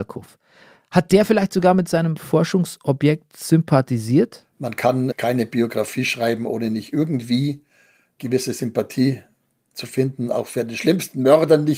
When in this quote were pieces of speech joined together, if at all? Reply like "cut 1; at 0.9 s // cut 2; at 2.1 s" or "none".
none